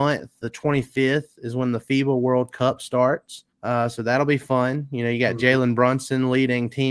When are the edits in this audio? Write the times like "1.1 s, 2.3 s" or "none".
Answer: 3.5 s